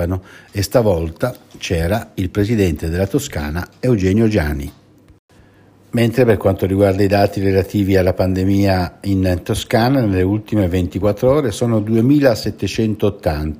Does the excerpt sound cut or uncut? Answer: uncut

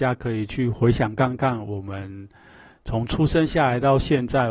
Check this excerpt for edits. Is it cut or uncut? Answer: uncut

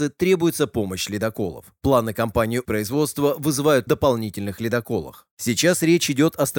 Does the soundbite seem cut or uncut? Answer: cut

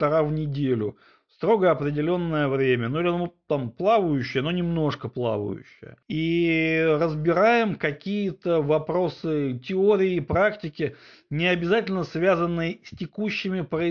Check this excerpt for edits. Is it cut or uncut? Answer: cut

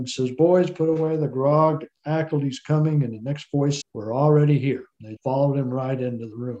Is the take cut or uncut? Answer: cut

